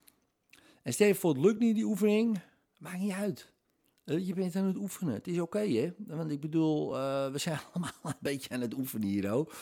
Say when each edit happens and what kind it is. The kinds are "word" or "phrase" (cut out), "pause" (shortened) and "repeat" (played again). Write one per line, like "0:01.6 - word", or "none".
none